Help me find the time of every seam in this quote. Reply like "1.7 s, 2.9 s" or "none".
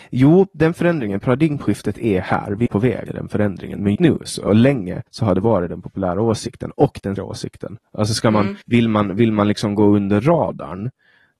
2.7 s, 3.1 s, 4.0 s, 4.5 s, 5.1 s, 7.2 s, 8.6 s